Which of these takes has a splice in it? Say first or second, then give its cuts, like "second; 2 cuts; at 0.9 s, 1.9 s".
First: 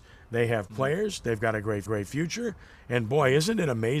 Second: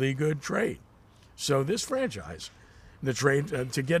first; 1 cut; at 1.9 s